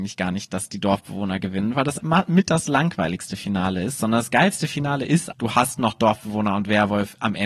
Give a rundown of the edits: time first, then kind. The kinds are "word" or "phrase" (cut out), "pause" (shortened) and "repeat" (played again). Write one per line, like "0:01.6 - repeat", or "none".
0:02.0 - word
0:05.3 - word